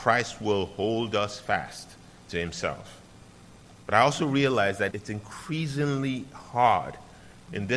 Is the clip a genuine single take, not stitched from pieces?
no; 1 cut; at 4.9 s

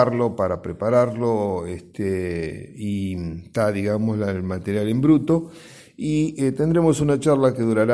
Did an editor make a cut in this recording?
no; 0 cuts

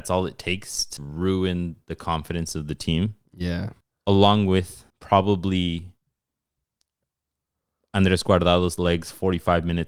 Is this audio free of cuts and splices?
no; 3 cuts; at 1.0 s, 3.8 s, 4.9 s

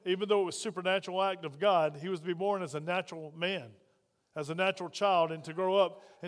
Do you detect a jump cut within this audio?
no; 0 cuts

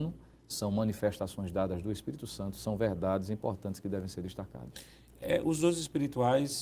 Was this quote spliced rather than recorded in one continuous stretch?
no; 0 cuts

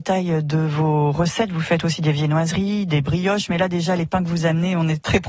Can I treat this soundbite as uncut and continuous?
yes; 0 cuts

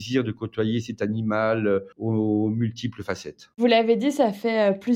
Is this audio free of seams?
no; 2 cuts; at 1.9 s, 3.5 s

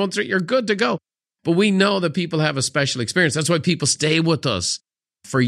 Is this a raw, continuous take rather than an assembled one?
yes; 0 cuts

